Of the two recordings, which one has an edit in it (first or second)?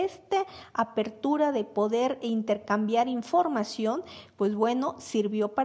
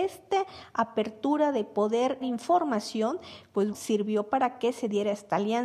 second